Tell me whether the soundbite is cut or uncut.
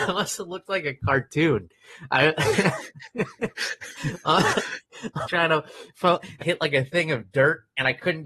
cut